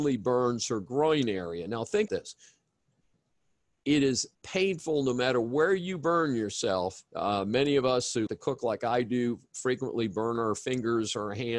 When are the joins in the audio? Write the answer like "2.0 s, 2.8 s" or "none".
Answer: 2.1 s, 4.3 s, 7.1 s, 8.3 s